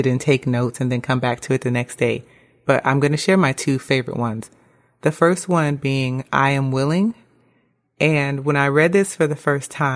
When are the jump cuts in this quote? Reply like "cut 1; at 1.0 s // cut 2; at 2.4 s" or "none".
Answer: none